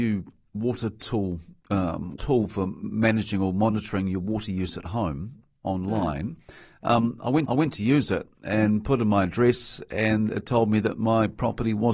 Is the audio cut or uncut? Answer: cut